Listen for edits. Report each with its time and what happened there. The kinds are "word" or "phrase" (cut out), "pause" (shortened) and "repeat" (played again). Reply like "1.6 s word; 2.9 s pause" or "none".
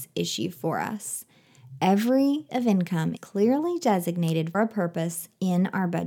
2.5 s word; 3.2 s word; 4.5 s word